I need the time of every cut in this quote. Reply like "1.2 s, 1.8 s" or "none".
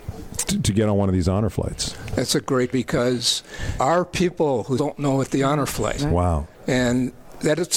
2.7 s, 3.8 s, 4.8 s, 6.0 s, 6.5 s